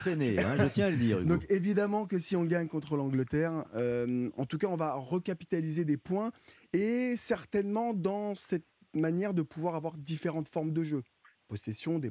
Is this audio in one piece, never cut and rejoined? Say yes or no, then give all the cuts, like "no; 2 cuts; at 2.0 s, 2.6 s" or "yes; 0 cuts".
yes; 0 cuts